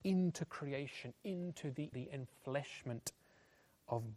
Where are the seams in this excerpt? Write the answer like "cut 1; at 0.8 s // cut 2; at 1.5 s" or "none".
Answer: cut 1; at 1.9 s